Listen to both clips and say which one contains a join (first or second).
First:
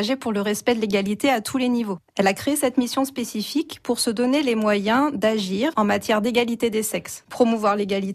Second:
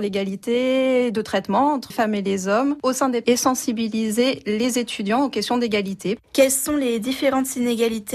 second